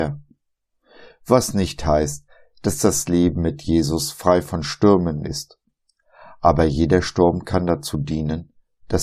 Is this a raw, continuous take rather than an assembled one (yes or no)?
yes